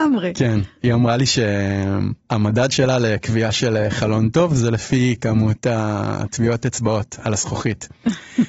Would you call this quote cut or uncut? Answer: uncut